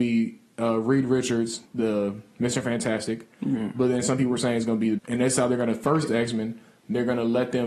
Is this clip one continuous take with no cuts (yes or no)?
no